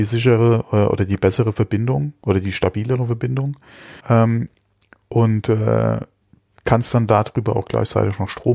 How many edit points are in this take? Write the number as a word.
two